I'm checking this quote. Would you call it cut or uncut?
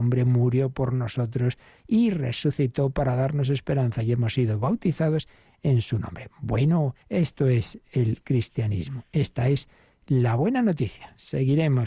cut